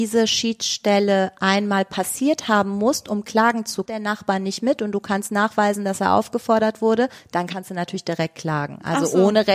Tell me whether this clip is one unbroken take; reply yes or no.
no